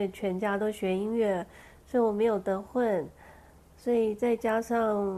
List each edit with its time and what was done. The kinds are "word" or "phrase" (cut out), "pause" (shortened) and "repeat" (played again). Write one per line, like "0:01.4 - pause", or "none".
none